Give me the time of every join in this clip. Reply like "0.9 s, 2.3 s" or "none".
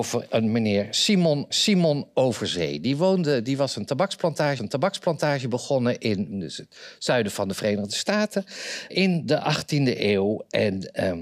1.5 s, 4.6 s, 6.3 s, 8.9 s